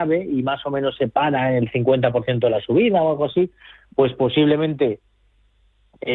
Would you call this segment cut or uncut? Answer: uncut